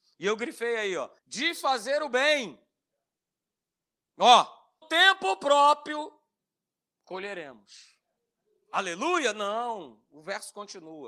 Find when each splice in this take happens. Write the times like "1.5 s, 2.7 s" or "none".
1.2 s, 4.8 s, 6.4 s